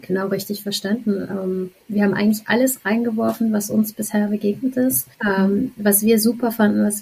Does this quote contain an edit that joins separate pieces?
yes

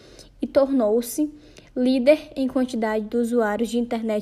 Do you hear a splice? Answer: no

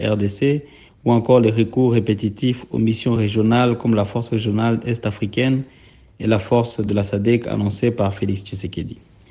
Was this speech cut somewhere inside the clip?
no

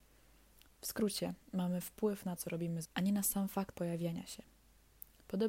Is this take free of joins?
no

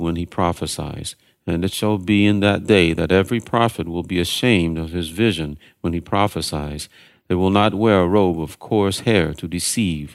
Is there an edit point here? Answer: no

